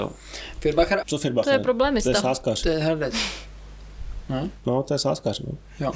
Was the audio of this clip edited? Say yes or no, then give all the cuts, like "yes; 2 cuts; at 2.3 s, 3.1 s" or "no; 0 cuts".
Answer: yes; 1 cut; at 1.0 s